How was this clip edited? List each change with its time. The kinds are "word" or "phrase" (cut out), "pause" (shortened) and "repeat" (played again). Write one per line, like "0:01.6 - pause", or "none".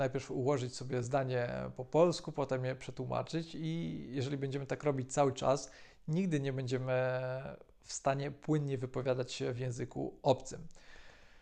none

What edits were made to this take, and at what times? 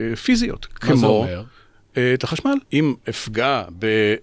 0:02.2 - word
0:02.6 - pause

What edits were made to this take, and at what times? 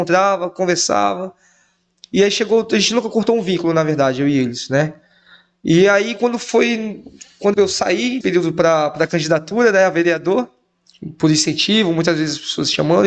0:07.5 - word
0:08.2 - word

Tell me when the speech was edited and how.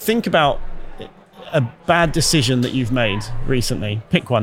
0:01.8 - pause

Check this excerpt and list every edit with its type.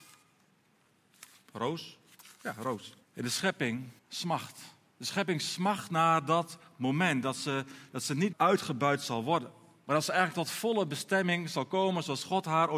0:02.2 - pause
0:03.0 - pause
0:04.0 - pause
0:08.3 - word

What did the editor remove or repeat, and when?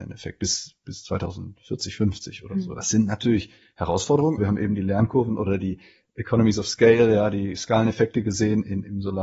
0:04.4 - word

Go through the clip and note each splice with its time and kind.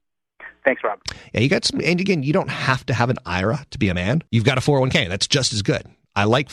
0:04.3 - pause

